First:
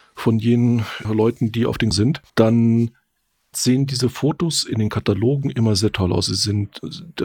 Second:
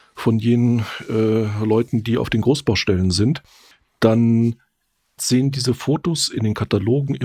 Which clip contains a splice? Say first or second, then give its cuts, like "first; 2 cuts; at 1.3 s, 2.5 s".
first; 3 cuts; at 1.0 s, 1.9 s, 2.3 s